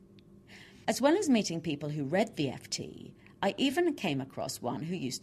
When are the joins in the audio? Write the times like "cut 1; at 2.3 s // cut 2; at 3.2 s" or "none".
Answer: none